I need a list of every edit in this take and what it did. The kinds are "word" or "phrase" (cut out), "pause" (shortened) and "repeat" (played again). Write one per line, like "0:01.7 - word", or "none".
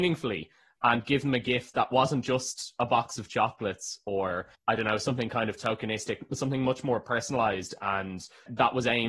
0:04.5 - pause